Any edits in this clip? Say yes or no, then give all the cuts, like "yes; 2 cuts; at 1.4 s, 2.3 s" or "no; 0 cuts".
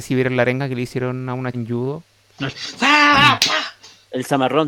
yes; 2 cuts; at 1.5 s, 2.1 s